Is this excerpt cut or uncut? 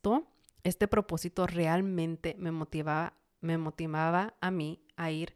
uncut